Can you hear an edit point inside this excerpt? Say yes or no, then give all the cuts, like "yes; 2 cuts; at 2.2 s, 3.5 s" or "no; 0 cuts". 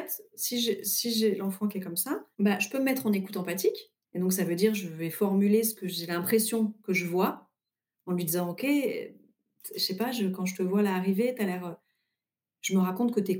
yes; 1 cut; at 4.0 s